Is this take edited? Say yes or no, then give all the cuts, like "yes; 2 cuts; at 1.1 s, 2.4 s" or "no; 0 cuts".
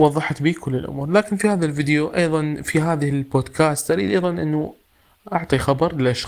no; 0 cuts